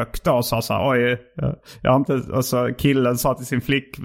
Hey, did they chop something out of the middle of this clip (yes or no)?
yes